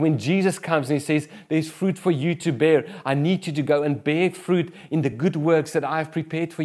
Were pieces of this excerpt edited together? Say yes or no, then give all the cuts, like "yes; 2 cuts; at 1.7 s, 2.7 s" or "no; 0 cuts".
no; 0 cuts